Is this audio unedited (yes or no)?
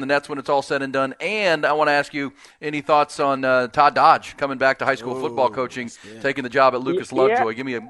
yes